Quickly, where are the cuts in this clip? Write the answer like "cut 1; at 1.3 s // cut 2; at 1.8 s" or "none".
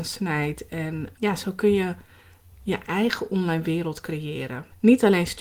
cut 1; at 1.2 s